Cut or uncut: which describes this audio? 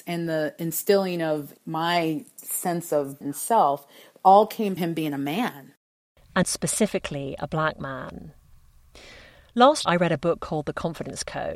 cut